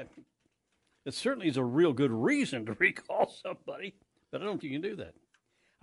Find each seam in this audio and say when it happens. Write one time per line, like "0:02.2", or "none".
0:04.6